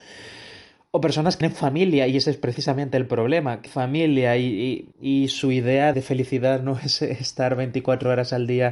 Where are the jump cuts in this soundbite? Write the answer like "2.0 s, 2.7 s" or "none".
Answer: 1.4 s, 3.7 s, 4.9 s, 5.9 s